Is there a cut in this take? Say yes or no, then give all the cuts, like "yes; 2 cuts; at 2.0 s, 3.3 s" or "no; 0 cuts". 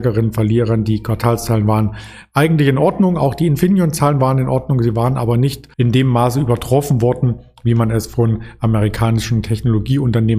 yes; 1 cut; at 5.7 s